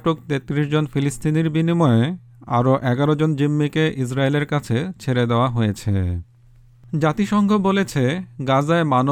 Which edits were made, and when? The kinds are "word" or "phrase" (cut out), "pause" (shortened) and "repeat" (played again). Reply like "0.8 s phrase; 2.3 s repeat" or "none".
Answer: none